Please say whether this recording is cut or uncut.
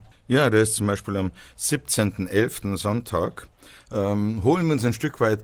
uncut